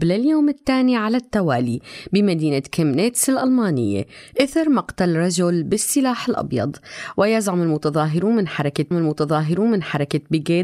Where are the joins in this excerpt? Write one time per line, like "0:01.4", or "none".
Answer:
0:08.9